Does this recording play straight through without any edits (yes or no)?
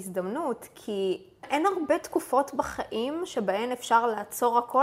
no